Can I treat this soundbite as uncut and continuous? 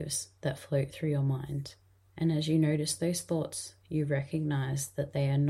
no; 1 cut; at 2.0 s

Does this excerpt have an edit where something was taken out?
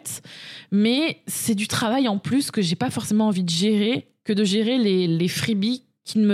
no; 0 cuts

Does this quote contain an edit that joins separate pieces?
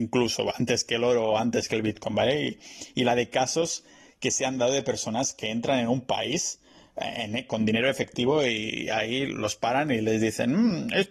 no; 0 cuts

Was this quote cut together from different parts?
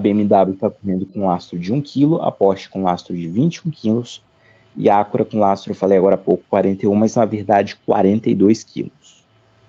no; 0 cuts

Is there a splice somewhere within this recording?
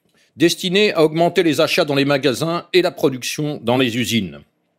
no; 0 cuts

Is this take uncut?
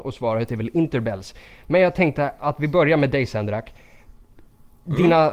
yes; 0 cuts

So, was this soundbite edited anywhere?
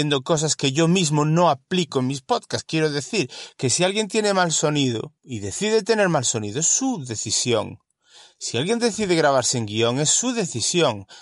yes; 1 cut; at 5.2 s

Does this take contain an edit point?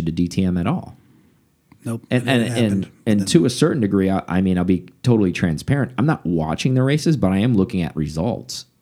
no; 0 cuts

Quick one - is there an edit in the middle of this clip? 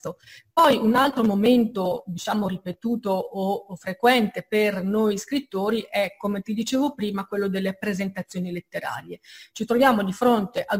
no; 0 cuts

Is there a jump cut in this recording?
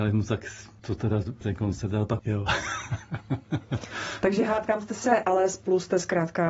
yes; 3 cuts; at 1.4 s, 2.2 s, 5.2 s

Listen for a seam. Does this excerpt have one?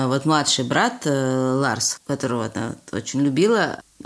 yes; 1 cut; at 2.0 s

